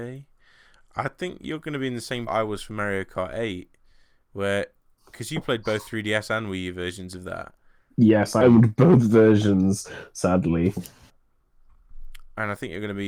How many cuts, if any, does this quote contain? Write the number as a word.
two